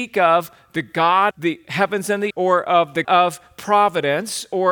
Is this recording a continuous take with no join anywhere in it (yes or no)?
no